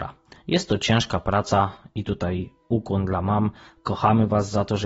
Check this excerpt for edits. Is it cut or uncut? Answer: uncut